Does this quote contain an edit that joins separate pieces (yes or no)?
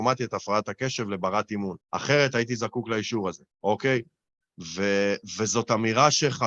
yes